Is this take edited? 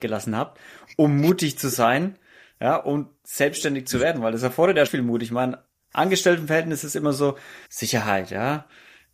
yes; 2 cuts; at 4.9 s, 7.6 s

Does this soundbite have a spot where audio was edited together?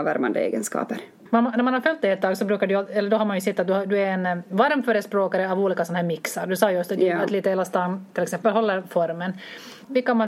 no; 0 cuts

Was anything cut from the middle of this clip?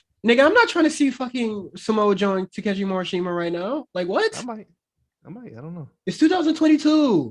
no; 0 cuts

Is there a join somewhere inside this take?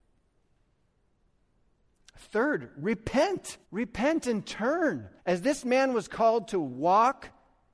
yes; 2 cuts; at 3.6 s, 5.2 s

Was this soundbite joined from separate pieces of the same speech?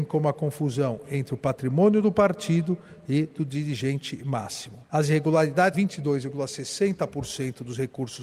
yes; 2 cuts; at 4.9 s, 5.7 s

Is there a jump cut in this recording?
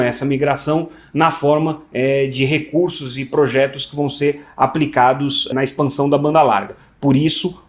no; 0 cuts

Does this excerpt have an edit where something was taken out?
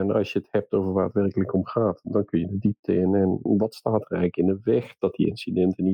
no; 0 cuts

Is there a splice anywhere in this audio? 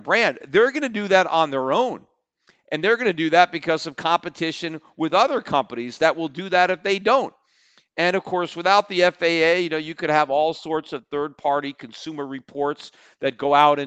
no; 0 cuts

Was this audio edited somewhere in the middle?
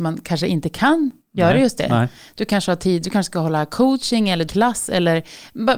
yes; 1 cut; at 4.5 s

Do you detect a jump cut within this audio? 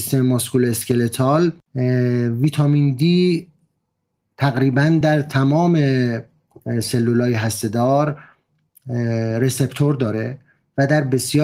no; 0 cuts

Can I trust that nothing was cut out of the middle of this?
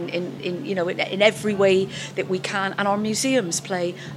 yes; 0 cuts

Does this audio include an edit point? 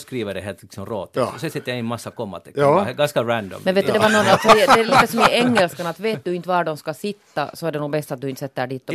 no; 0 cuts

